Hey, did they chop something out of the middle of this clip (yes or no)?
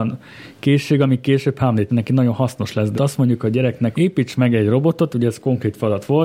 yes